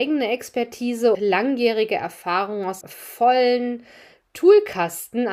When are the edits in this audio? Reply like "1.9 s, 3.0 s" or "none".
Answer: 1.1 s, 2.8 s